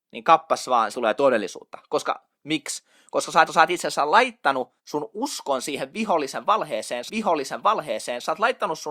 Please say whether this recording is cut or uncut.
cut